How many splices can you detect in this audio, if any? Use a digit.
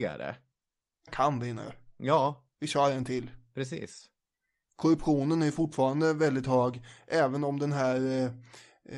1